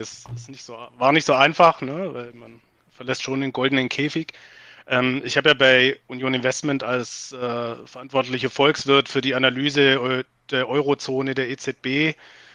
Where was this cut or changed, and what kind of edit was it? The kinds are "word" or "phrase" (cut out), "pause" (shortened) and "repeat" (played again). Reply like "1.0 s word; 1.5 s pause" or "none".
none